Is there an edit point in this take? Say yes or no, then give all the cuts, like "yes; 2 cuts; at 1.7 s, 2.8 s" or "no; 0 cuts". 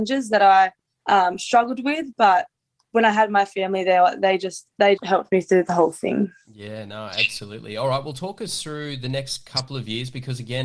yes; 1 cut; at 5.0 s